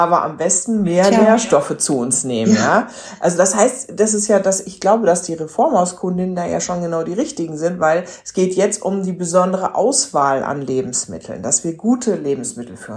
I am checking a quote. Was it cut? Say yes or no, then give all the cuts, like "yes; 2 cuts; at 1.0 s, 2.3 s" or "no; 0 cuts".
no; 0 cuts